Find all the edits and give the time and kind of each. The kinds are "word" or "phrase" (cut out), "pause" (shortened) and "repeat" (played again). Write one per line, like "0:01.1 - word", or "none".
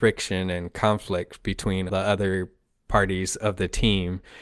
0:01.9 - word

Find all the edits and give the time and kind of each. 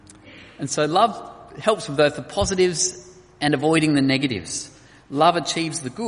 none

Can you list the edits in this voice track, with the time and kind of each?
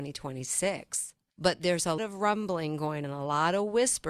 0:02.0 - word
0:03.0 - word

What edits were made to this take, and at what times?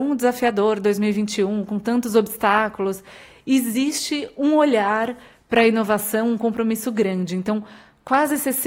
none

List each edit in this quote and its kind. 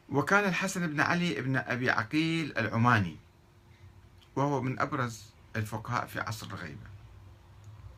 none

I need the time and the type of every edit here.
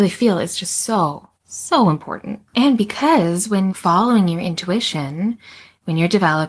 0:01.4 - pause
0:02.5 - pause
0:03.7 - phrase

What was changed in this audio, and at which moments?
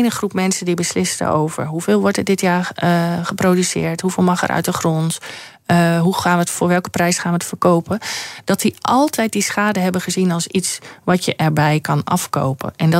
none

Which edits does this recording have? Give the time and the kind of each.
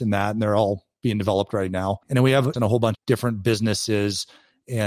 0:02.0 - pause
0:02.5 - word
0:02.9 - phrase

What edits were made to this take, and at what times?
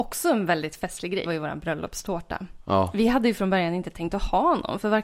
0:01.2 - word

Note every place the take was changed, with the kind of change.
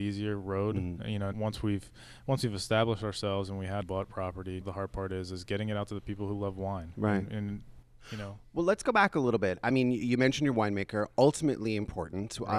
0:01.3 - word
0:03.8 - phrase
0:04.6 - word

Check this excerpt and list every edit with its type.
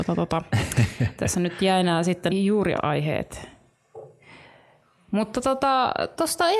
0:02.3 - word
0:02.8 - word

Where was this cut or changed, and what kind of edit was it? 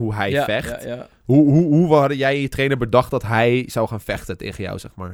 none

